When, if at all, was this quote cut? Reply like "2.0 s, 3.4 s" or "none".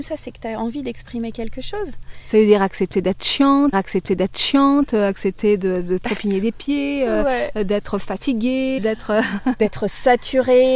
3.7 s, 8.8 s